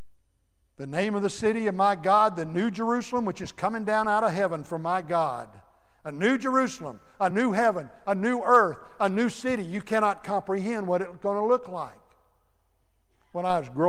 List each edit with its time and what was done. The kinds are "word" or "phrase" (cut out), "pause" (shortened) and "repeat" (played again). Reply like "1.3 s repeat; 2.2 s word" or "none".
none